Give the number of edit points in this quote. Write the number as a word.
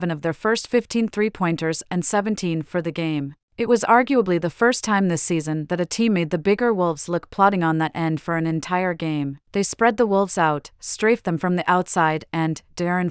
two